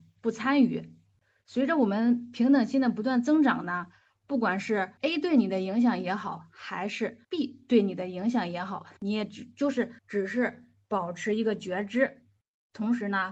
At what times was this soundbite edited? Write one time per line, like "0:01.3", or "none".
0:05.0
0:07.2
0:09.0
0:10.0